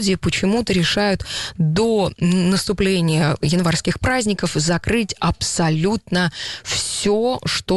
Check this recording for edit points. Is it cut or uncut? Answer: uncut